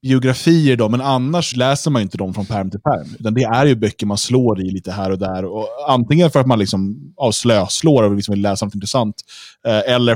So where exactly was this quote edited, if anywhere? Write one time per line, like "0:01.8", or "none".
0:01.5